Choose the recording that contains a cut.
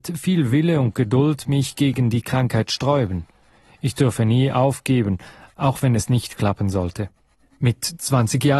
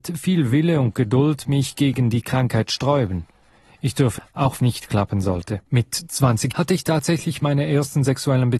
second; 4 cuts; at 4.2 s, 4.6 s, 5.7 s, 6.5 s

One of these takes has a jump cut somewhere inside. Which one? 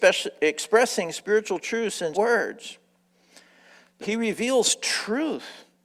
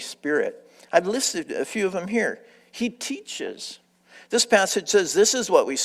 first; 2 cuts; at 2.1 s, 4.0 s

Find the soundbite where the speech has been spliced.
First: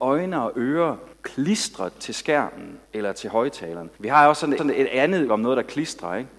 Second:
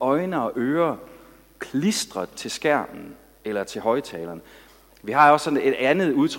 first; 5 cuts; at 1.1 s, 2.8 s, 3.9 s, 4.6 s, 5.3 s

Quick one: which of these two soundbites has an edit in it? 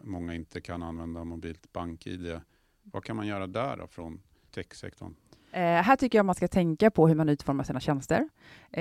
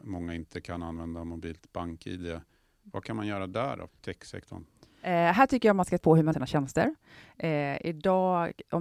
second; 3 cuts; at 3.9 s, 6.0 s, 6.3 s

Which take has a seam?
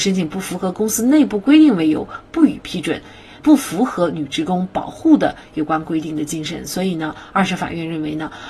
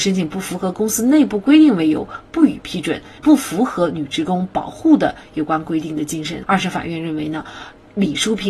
second; 2 cuts; at 3.2 s, 6.4 s

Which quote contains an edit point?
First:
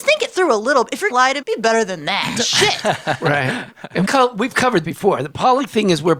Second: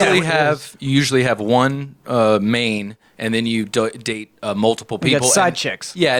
first; 4 cuts; at 1.1 s, 1.4 s, 4.0 s, 4.8 s

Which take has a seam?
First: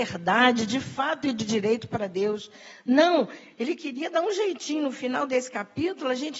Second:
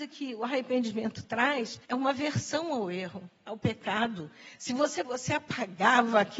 second; 2 cuts; at 1.8 s, 5.0 s

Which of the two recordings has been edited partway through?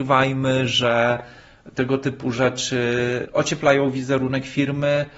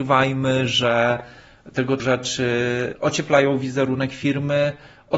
second; 1 cut; at 2.0 s

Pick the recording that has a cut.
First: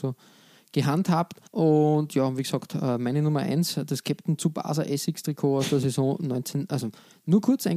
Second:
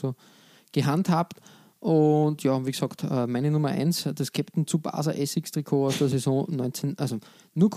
first; 1 cut; at 1.5 s

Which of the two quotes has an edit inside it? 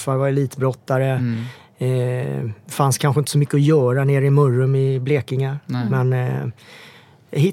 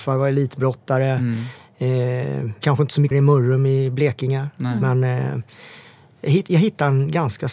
second; 2 cuts; at 2.6 s, 3.1 s

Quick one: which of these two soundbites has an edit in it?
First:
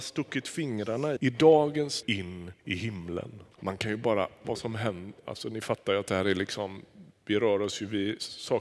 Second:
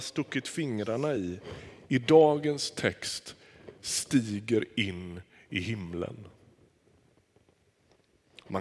first; 5 cuts; at 1.2 s, 2.0 s, 2.6 s, 3.5 s, 4.4 s

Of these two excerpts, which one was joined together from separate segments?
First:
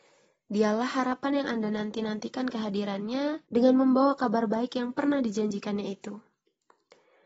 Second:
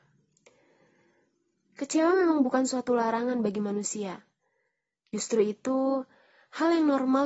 first; 1 cut; at 3.4 s

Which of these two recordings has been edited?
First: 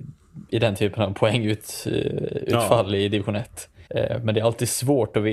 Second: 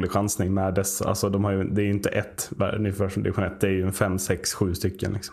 first; 1 cut; at 3.9 s

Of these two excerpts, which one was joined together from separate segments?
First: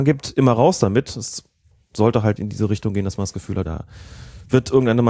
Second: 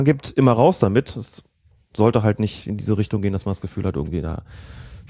first; 2 cuts; at 2.4 s, 3.6 s

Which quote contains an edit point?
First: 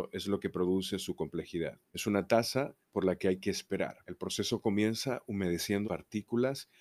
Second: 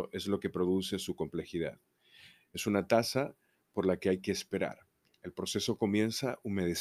first; 4 cuts; at 1.9 s, 2.8 s, 4.0 s, 5.8 s

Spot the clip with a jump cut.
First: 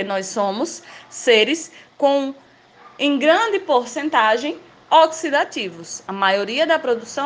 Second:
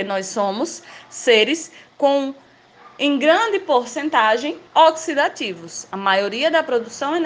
second; 1 cut; at 4.7 s

